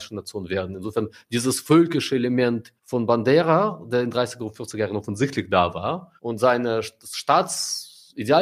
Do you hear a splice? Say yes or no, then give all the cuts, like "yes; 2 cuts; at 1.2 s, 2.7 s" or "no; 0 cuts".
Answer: yes; 2 cuts; at 2.8 s, 6.2 s